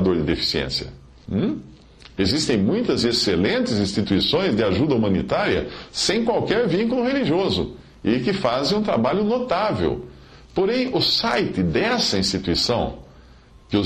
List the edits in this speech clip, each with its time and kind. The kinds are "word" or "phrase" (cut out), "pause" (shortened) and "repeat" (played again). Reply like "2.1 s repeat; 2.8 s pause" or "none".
none